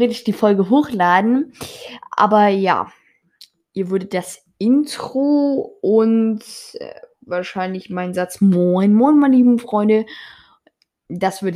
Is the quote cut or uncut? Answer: uncut